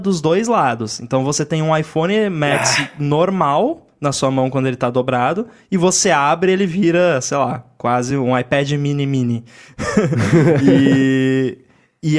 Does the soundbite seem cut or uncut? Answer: uncut